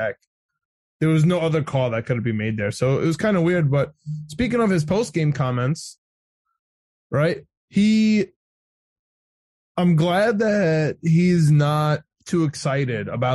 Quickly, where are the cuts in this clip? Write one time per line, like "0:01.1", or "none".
none